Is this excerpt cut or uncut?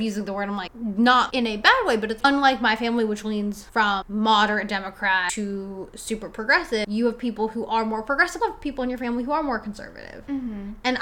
cut